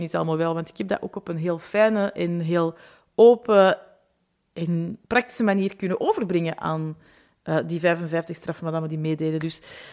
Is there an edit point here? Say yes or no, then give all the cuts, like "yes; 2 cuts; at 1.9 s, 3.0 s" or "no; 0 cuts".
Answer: yes; 1 cut; at 5.0 s